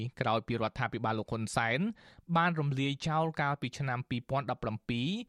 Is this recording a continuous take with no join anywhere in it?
yes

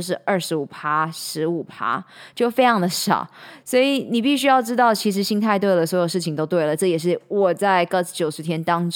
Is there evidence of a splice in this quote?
no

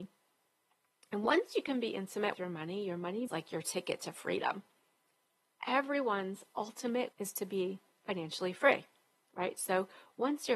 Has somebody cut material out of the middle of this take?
yes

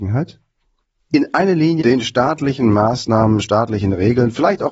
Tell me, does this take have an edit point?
yes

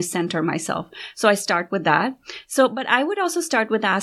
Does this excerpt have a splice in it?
no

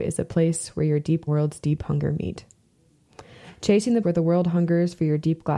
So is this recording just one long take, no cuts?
no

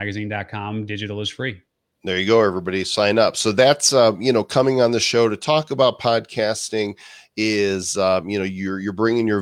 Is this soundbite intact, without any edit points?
yes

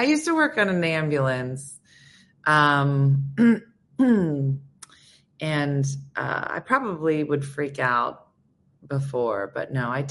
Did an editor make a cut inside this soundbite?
no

